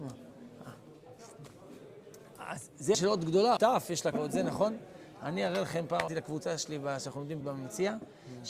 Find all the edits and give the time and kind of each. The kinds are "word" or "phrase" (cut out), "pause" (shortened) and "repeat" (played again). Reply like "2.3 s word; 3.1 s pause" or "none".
2.9 s word; 3.6 s word; 4.1 s word; 6.1 s word; 7.4 s word